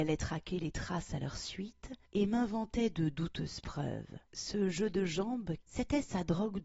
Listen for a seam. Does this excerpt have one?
yes; 3 cuts; at 2.1 s, 4.2 s, 5.6 s

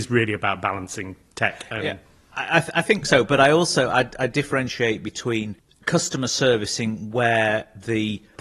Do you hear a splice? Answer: no; 0 cuts

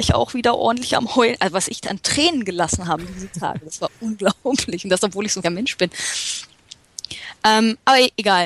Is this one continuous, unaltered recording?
no; 1 cut; at 5.4 s

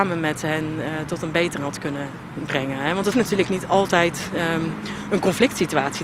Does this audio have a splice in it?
yes; 2 cuts; at 1.6 s, 3.1 s

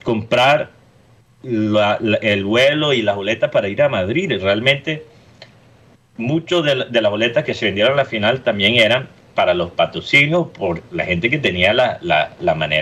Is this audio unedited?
yes; 0 cuts

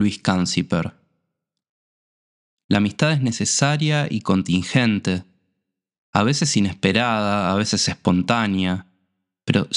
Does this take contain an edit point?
no; 0 cuts

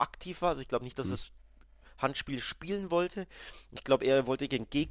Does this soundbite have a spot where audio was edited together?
no; 0 cuts

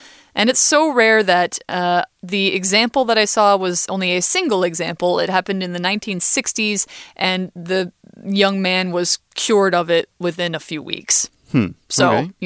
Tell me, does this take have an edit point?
no; 0 cuts

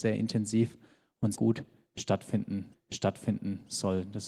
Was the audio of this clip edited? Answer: yes; 2 cuts; at 1.3 s, 2.7 s

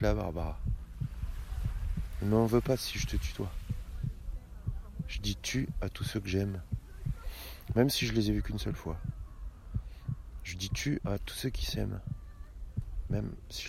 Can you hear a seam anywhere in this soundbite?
no; 0 cuts

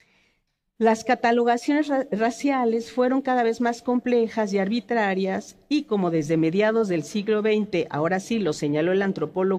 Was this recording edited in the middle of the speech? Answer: no; 0 cuts

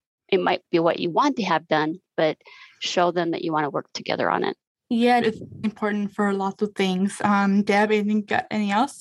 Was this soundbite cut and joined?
yes; 2 cuts; at 5.2 s, 5.6 s

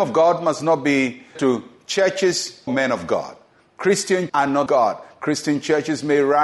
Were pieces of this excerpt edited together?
yes; 4 cuts; at 1.4 s, 2.7 s, 4.3 s, 4.7 s

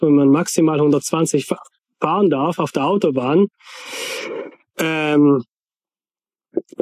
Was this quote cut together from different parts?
no; 0 cuts

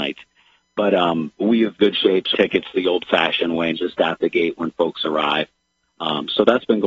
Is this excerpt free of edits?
no; 4 cuts; at 1.4 s, 1.8 s, 2.3 s, 3.7 s

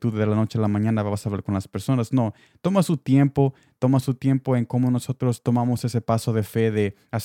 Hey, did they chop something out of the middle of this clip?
no; 0 cuts

